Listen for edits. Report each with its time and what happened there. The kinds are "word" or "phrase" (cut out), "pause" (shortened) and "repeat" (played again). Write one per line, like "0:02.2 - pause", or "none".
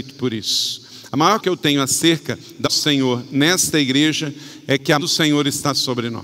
0:01.4 - word
0:02.6 - word
0:05.0 - word